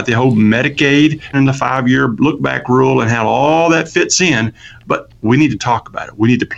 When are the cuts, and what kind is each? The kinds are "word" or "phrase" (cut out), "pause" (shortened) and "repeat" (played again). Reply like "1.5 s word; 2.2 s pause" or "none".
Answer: 1.3 s phrase